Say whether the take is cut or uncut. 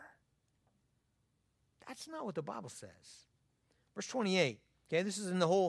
uncut